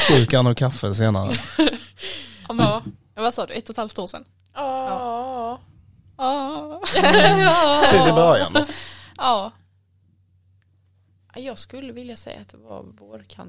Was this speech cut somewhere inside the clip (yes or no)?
no